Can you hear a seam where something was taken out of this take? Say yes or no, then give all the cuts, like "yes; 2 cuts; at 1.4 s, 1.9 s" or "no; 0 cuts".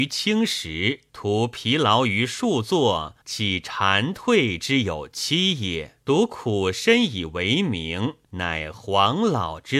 yes; 4 cuts; at 1.1 s, 3.2 s, 6.0 s, 8.2 s